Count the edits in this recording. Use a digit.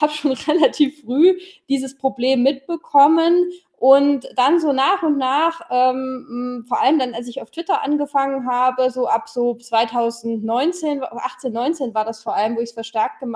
0